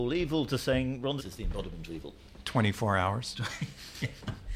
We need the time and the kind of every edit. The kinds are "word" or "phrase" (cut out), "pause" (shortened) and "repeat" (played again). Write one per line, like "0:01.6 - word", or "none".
0:01.2 - word
0:01.9 - word